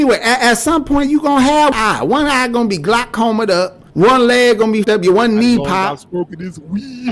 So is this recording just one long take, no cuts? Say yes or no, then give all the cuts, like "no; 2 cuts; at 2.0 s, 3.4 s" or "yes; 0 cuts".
no; 3 cuts; at 1.7 s, 3.9 s, 4.8 s